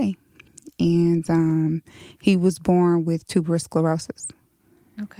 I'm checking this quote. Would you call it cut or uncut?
uncut